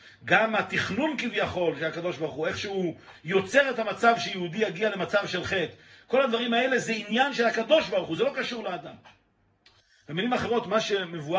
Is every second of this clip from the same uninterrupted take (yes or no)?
yes